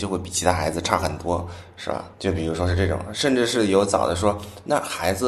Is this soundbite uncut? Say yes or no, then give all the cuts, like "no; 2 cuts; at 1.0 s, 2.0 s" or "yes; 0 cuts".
no; 1 cut; at 2.1 s